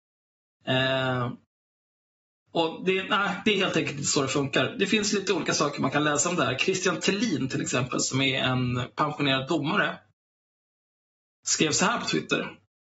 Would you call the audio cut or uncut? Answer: uncut